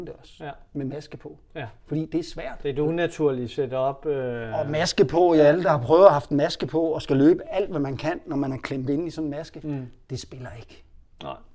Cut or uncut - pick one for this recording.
uncut